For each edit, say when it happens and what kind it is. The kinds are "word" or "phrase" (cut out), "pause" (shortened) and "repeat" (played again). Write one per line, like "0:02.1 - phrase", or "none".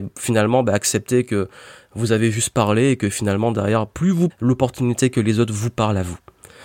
0:04.3 - phrase